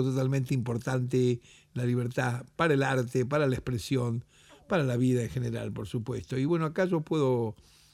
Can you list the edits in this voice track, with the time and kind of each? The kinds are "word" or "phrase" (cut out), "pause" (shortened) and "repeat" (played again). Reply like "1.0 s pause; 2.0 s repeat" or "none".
none